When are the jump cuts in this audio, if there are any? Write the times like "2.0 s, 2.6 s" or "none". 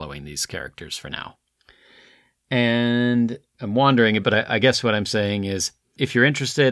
4.2 s